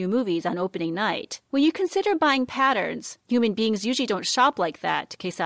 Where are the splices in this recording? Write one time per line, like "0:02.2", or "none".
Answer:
0:01.5
0:03.2